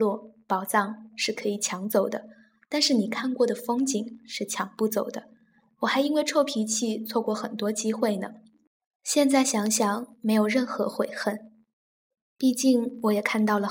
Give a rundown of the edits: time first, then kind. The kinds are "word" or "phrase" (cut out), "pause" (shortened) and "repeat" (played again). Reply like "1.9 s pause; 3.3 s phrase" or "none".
none